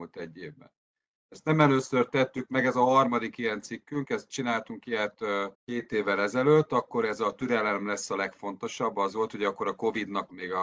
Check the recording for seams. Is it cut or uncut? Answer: cut